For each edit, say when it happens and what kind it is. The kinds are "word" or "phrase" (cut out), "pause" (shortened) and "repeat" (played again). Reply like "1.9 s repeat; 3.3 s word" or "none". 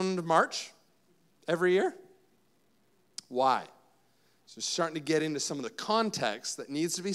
none